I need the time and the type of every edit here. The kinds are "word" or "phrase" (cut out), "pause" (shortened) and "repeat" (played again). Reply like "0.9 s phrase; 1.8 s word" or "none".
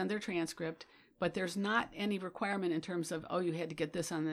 none

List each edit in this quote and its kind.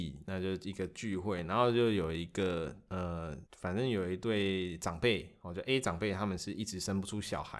3.5 s pause

